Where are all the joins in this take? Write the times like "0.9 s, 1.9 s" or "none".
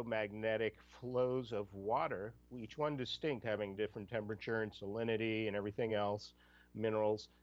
none